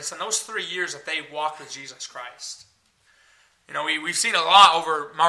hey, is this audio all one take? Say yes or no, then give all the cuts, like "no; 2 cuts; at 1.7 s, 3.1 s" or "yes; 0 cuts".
yes; 0 cuts